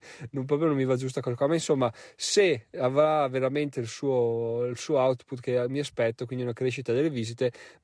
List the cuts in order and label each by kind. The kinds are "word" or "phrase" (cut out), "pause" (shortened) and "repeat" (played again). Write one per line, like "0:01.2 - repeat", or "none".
none